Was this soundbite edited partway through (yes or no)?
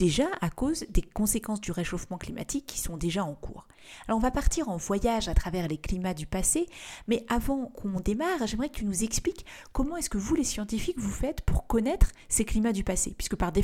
no